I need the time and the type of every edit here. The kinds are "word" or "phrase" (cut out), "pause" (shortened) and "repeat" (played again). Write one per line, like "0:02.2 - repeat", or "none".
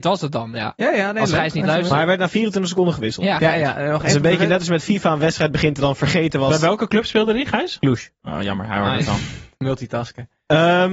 none